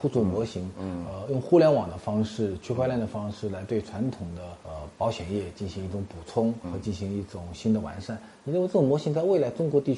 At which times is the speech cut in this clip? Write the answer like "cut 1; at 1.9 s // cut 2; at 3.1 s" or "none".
cut 1; at 4.6 s // cut 2; at 6.6 s

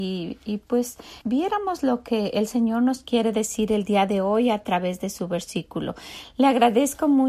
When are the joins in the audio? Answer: cut 1; at 1.2 s

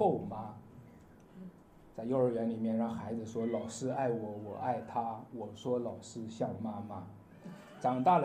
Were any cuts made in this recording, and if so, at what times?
cut 1; at 1.6 s

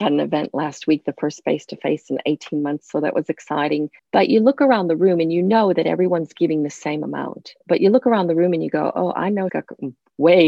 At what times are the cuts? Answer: cut 1; at 4.0 s // cut 2; at 7.6 s // cut 3; at 9.5 s

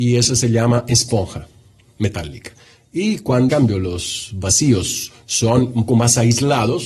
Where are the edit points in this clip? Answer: cut 1; at 3.5 s // cut 2; at 5.9 s

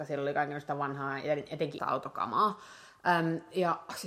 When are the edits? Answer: cut 1; at 1.8 s

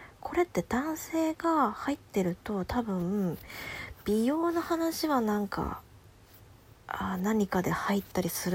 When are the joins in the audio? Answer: none

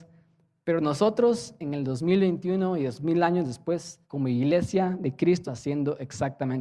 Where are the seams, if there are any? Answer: cut 1; at 4.0 s // cut 2; at 5.5 s

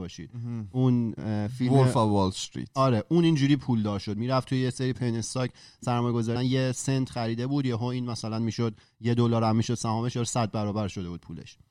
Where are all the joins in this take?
cut 1; at 6.4 s

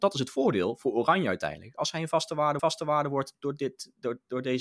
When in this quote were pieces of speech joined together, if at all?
cut 1; at 2.6 s

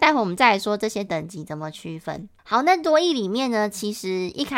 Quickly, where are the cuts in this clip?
cut 1; at 2.4 s

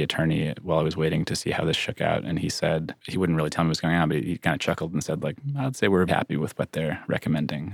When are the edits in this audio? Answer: cut 1; at 3.0 s // cut 2; at 6.1 s

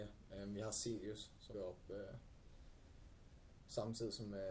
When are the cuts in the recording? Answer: cut 1; at 1.5 s

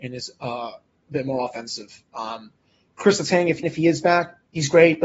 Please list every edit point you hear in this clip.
cut 1; at 3.6 s

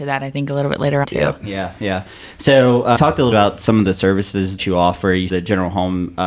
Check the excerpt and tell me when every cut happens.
cut 1; at 1.0 s // cut 2; at 3.0 s // cut 3; at 3.3 s // cut 4; at 4.6 s // cut 5; at 5.3 s

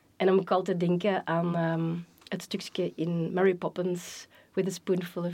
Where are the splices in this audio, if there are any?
none

